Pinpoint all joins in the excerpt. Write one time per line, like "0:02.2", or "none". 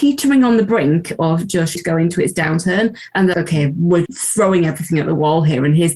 0:01.7
0:03.3
0:04.0